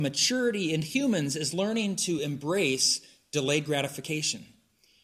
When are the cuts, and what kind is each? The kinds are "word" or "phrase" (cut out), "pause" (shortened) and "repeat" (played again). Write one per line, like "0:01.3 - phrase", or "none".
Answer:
none